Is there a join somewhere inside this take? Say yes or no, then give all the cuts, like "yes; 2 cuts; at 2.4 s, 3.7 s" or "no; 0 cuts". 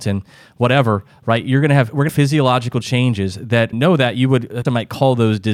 yes; 3 cuts; at 2.1 s, 3.7 s, 4.6 s